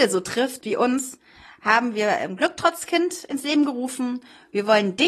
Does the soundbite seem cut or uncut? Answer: uncut